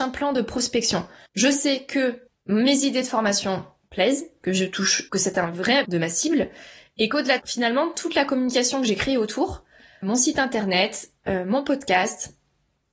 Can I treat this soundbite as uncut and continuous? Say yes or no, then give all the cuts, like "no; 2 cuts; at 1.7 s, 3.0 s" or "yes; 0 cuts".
no; 6 cuts; at 1.3 s, 2.3 s, 5.1 s, 5.8 s, 7.4 s, 10.0 s